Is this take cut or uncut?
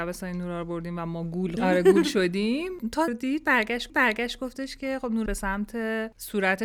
cut